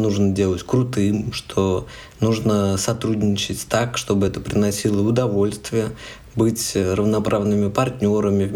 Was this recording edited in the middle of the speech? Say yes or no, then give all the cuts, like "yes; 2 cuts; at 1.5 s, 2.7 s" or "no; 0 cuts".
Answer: no; 0 cuts